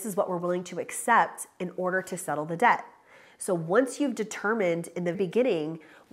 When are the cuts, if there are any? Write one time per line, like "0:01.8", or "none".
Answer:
0:05.1